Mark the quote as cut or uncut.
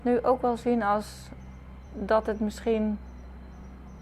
uncut